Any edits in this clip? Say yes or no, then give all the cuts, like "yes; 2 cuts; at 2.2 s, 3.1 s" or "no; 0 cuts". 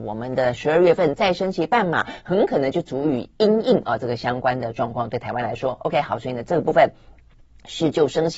no; 0 cuts